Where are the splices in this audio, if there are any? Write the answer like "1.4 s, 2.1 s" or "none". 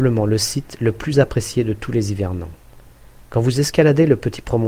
none